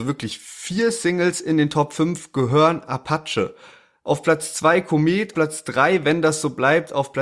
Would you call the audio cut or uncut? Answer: cut